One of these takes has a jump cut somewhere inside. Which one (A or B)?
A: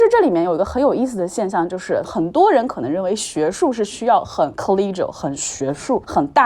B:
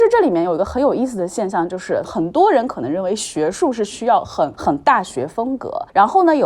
B